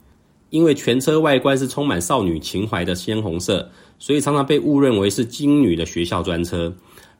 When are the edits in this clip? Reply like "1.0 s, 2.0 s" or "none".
none

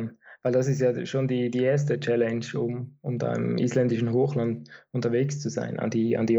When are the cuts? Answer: none

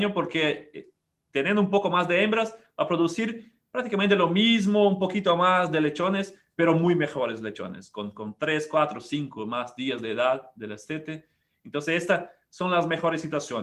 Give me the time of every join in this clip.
none

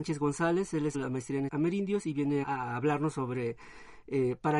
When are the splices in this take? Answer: 0.9 s, 1.5 s, 2.4 s

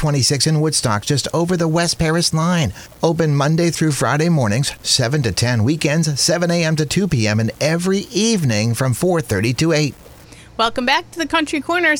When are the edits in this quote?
none

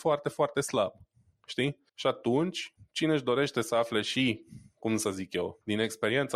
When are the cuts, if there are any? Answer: 1.9 s

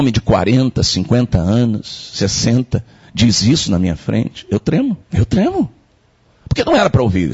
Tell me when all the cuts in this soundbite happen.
5.0 s

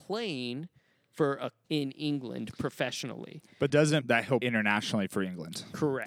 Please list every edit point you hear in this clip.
1.6 s, 3.7 s, 4.0 s, 4.4 s

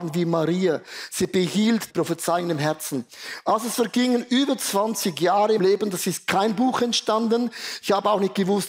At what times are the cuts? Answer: 1.9 s, 5.6 s

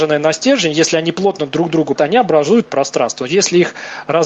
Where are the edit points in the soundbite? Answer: 2.0 s, 2.7 s

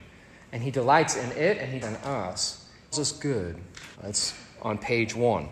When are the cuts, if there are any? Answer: 1.8 s, 2.9 s, 3.9 s

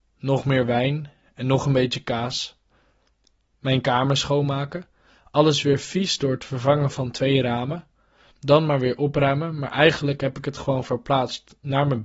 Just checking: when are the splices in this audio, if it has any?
none

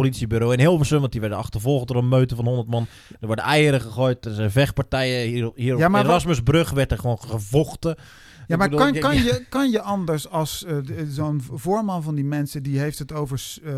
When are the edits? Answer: none

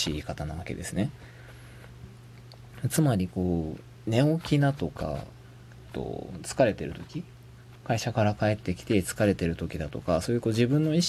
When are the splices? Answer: 5.9 s

